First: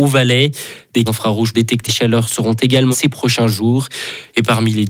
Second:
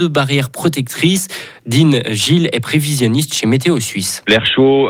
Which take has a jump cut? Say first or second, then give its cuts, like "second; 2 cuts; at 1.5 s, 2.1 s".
first; 4 cuts; at 1.1 s, 1.5 s, 1.9 s, 2.9 s